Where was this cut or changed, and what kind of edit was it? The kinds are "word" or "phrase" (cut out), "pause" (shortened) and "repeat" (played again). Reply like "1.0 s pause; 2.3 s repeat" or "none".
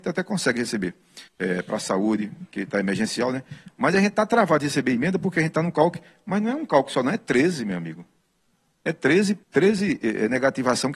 1.3 s pause; 9.4 s pause

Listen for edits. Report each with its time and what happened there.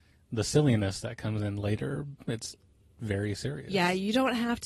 none

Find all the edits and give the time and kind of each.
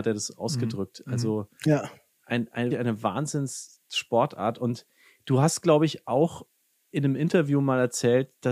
2.7 s word

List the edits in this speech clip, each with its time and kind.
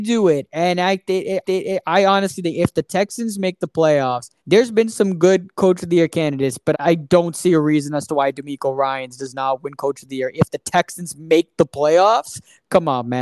1.4 s repeat; 4.4 s pause; 6.7 s word

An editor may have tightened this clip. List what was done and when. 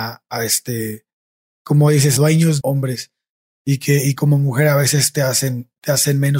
2.2 s word; 2.6 s phrase; 4.2 s word

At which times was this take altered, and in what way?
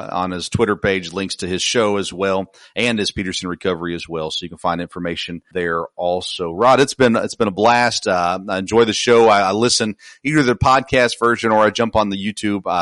5.5 s word

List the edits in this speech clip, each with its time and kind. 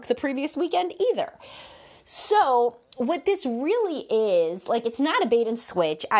none

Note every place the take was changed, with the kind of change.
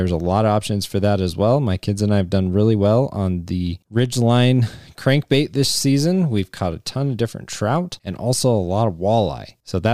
none

